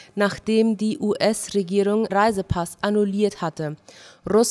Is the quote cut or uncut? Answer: cut